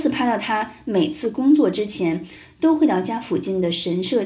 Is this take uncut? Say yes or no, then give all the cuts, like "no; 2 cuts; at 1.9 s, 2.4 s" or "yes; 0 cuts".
yes; 0 cuts